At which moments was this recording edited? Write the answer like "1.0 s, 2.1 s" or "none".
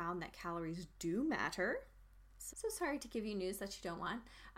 2.5 s